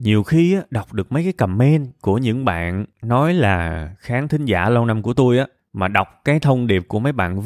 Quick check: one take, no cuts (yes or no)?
yes